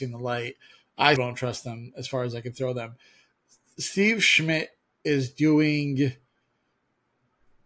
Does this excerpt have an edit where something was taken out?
yes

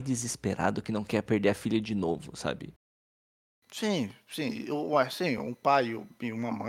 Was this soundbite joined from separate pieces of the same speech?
no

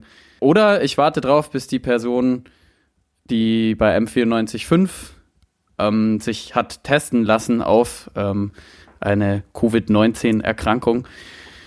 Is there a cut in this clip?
no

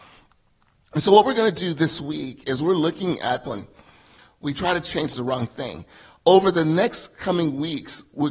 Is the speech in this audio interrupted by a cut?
yes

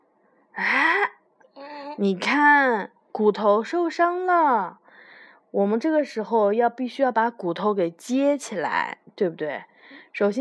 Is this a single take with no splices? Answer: yes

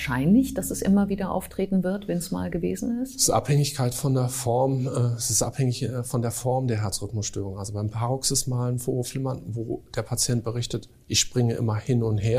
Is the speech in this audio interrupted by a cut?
no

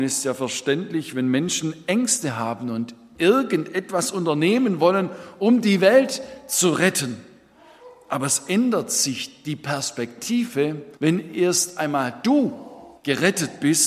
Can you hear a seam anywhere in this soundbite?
yes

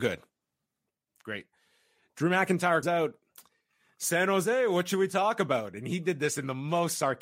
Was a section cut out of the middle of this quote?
yes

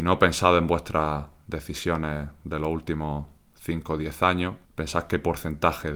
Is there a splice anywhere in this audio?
yes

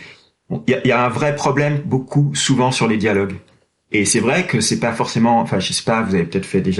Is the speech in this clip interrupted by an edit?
no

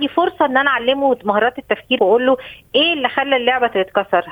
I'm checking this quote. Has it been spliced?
yes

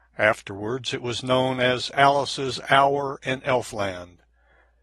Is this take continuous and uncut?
yes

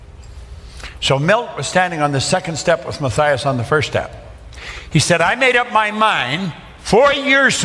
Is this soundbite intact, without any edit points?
yes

